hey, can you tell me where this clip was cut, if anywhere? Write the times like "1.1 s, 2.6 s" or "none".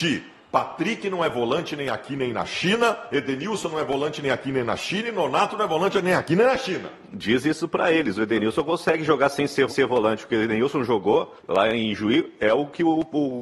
9.7 s, 11.4 s